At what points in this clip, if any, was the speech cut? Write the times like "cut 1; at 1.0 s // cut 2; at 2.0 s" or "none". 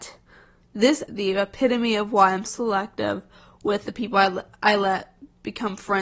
cut 1; at 1.1 s // cut 2; at 2.5 s